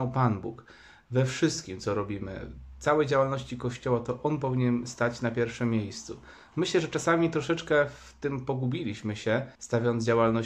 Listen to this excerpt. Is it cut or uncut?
cut